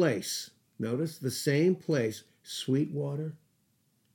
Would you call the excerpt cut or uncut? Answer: uncut